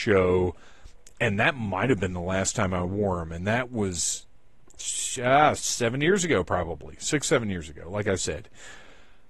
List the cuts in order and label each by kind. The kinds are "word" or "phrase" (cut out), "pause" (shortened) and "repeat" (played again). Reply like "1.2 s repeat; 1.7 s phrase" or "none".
none